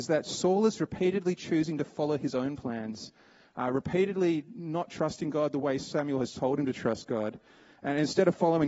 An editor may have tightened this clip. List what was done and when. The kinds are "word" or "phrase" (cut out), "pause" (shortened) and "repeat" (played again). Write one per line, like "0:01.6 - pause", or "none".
none